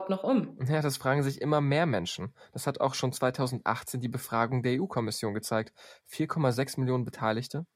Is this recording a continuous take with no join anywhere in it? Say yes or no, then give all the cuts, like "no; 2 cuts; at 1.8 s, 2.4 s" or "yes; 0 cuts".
yes; 0 cuts